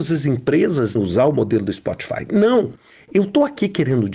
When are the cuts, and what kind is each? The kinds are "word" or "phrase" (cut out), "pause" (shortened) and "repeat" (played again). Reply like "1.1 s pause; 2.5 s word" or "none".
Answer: 1.0 s word